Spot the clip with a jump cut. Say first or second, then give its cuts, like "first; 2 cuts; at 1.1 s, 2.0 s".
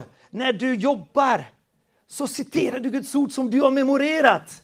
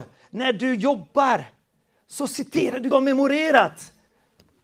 second; 1 cut; at 2.9 s